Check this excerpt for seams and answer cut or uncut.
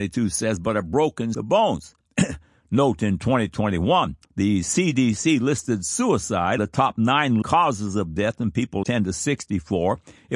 cut